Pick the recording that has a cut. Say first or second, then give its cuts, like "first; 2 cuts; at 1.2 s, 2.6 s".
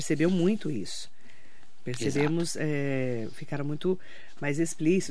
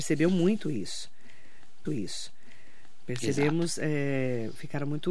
second; 1 cut; at 1.8 s